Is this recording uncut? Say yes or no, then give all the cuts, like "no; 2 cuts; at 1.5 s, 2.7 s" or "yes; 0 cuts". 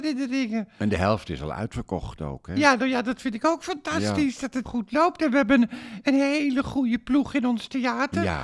no; 1 cut; at 4.7 s